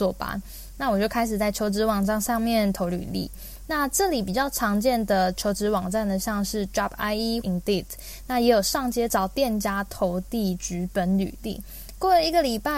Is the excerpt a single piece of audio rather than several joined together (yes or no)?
no